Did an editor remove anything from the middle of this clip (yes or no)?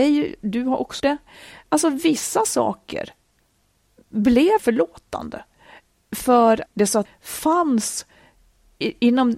yes